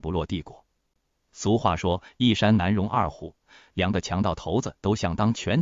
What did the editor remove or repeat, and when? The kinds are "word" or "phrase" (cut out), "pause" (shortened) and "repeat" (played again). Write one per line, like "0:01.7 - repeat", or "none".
none